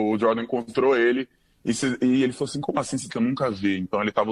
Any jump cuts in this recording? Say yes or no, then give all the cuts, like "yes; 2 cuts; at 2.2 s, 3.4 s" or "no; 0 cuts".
yes; 1 cut; at 3.1 s